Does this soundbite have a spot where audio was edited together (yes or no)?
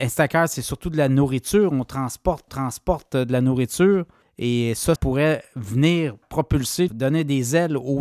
yes